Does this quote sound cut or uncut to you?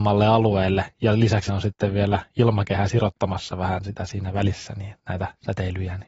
cut